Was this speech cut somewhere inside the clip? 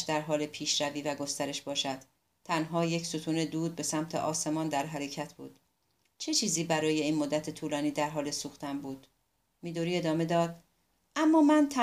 no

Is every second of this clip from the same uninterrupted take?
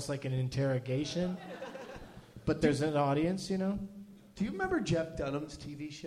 yes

